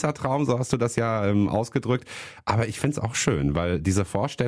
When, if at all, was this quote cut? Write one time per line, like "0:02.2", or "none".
none